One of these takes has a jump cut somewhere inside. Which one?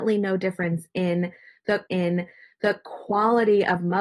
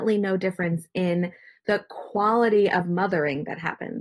first; 1 cut; at 1.9 s

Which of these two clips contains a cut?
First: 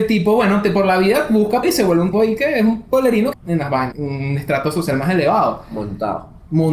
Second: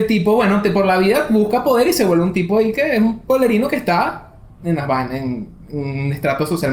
first; 4 cuts; at 1.6 s, 2.1 s, 3.3 s, 3.9 s

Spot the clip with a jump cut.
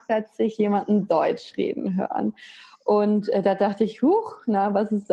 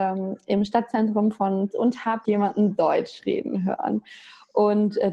second; 2 cuts; at 1.7 s, 2.2 s

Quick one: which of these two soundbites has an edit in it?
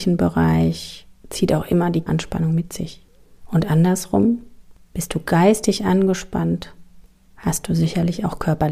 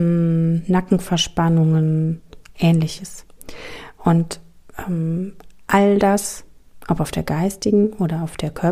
first; 1 cut; at 2.1 s

